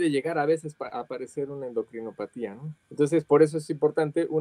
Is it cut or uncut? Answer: cut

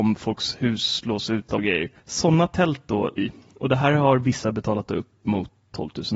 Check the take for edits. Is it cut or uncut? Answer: cut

